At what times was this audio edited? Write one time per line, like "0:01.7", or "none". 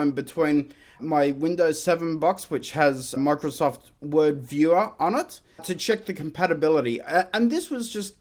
0:01.0
0:03.2
0:05.6